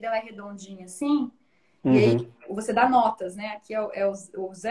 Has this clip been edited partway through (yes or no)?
no